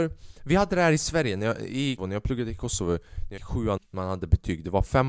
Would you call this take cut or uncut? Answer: cut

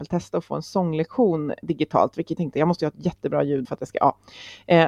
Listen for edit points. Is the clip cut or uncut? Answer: cut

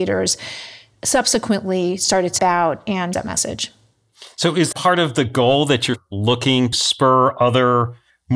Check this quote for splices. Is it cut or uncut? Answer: cut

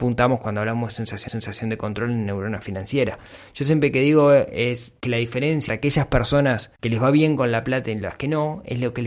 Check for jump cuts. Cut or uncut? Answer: cut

